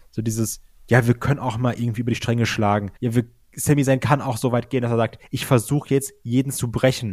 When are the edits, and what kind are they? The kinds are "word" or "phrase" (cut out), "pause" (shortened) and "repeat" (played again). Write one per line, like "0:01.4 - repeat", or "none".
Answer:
0:03.0 - pause